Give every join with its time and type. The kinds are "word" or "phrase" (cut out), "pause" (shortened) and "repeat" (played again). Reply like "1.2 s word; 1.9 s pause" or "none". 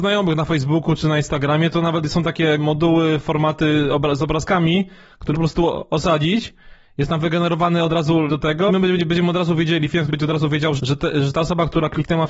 2.6 s word; 5.3 s word; 8.3 s word; 8.7 s word; 10.1 s word; 10.8 s word